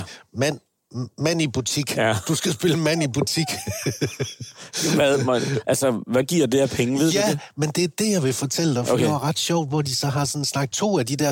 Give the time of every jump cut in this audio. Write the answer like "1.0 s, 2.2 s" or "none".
none